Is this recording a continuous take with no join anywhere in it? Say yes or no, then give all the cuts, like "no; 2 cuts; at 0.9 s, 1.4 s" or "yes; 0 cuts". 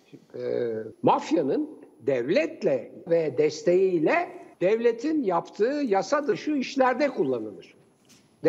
no; 3 cuts; at 0.9 s, 3.1 s, 4.5 s